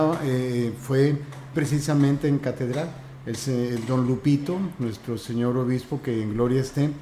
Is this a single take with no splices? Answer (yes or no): no